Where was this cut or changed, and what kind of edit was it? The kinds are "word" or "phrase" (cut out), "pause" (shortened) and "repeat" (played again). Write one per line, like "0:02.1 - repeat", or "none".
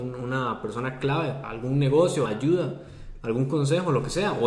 0:01.4 - word
0:02.3 - word